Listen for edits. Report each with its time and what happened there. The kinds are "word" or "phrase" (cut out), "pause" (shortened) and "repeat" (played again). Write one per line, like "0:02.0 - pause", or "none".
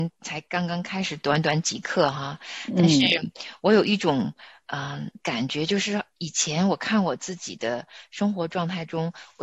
none